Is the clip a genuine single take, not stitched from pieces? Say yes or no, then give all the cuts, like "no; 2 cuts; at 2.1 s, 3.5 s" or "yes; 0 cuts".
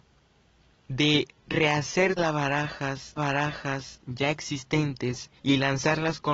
no; 3 cuts; at 2.2 s, 3.2 s, 5.4 s